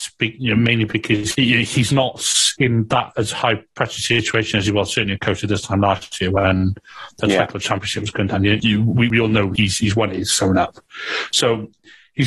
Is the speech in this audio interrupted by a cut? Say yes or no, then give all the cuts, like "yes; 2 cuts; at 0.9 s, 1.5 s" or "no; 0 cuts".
no; 0 cuts